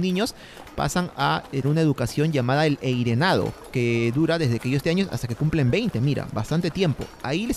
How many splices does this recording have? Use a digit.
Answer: 2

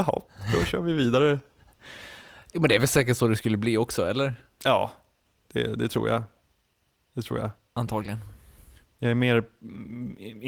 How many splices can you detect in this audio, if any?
0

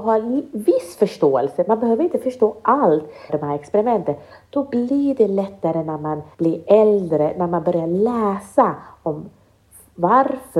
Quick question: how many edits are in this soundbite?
2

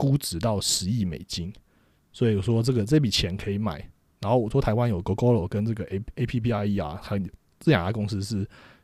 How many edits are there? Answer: 0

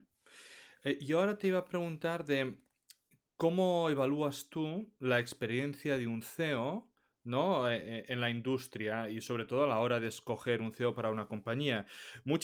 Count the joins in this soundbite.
0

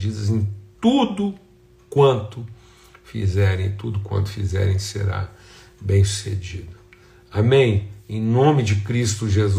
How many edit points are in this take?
0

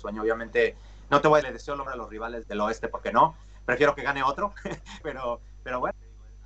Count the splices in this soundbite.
4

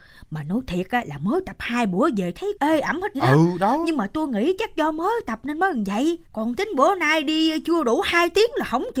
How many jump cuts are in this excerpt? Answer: 3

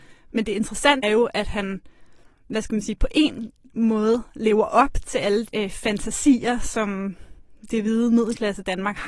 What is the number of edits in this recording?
2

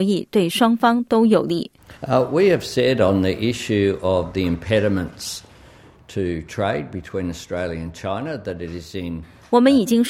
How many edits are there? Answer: 1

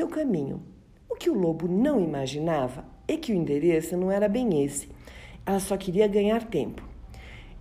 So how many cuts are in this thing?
0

